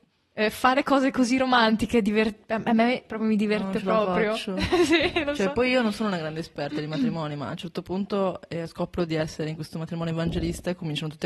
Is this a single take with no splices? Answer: yes; 0 cuts

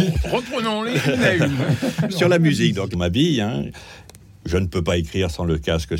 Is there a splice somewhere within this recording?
yes; 1 cut; at 2.9 s

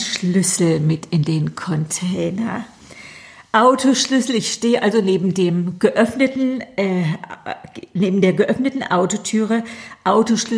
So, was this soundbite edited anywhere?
no; 0 cuts

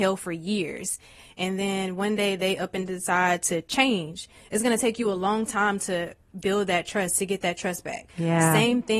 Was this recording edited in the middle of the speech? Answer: no; 0 cuts

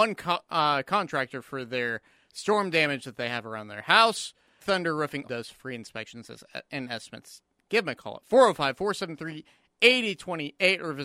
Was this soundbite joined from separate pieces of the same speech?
yes; 2 cuts; at 4.6 s, 5.2 s

